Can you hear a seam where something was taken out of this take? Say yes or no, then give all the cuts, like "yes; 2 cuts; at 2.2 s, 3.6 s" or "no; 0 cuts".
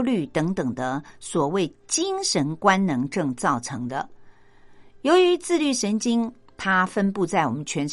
no; 0 cuts